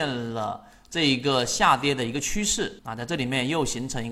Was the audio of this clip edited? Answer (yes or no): yes